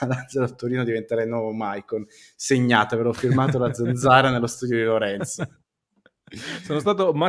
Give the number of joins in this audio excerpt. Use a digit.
0